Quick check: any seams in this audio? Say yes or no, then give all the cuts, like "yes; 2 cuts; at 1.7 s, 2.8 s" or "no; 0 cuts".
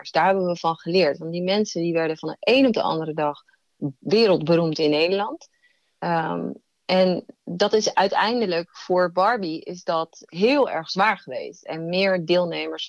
no; 0 cuts